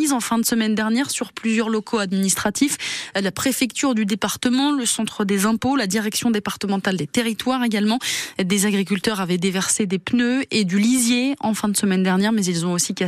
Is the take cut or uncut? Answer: uncut